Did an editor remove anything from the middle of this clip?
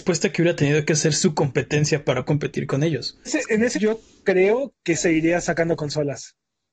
yes; 4 cuts; at 2.3 s, 3.3 s, 3.7 s, 5.0 s

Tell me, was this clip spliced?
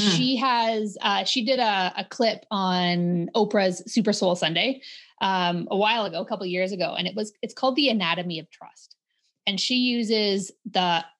no; 0 cuts

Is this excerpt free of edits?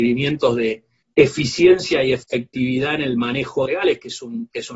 no; 2 cuts; at 1.0 s, 3.7 s

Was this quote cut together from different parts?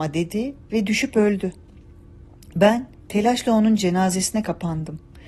no; 0 cuts

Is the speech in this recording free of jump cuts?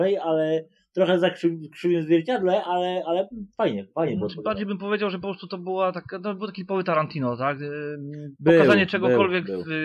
yes; 0 cuts

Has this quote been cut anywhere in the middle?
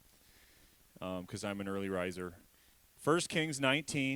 yes; 1 cut; at 2.7 s

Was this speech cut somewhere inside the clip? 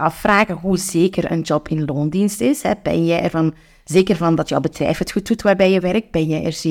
no; 0 cuts

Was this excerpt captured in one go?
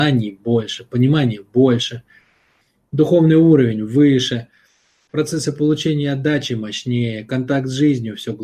yes; 0 cuts

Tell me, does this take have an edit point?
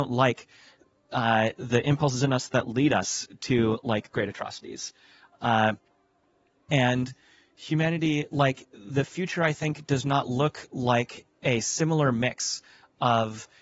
no; 0 cuts

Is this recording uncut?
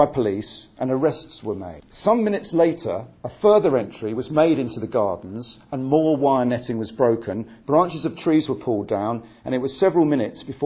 yes; 0 cuts

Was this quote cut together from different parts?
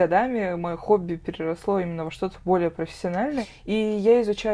no; 0 cuts

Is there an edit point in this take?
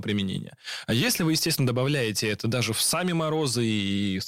no; 0 cuts

